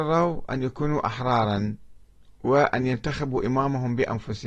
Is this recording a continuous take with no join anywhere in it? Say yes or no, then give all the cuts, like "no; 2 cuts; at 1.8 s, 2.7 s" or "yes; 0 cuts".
yes; 0 cuts